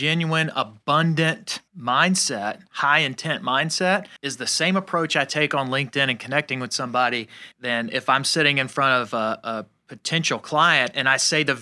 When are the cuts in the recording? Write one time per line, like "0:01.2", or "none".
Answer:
0:01.7
0:04.2
0:07.5